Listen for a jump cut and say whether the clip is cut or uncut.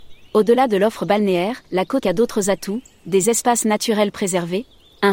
cut